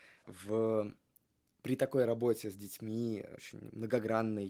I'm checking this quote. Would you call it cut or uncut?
uncut